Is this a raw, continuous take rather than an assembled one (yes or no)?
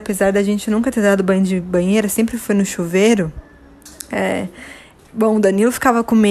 yes